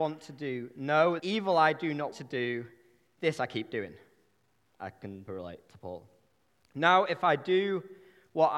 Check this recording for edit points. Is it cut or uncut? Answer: cut